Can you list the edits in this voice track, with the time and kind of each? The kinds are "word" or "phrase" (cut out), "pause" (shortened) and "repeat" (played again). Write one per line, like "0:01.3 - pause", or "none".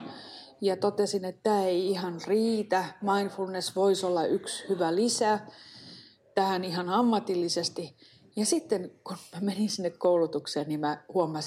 none